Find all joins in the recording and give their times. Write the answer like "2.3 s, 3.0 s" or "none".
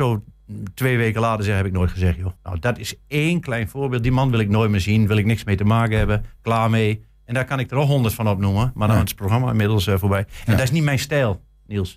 2.4 s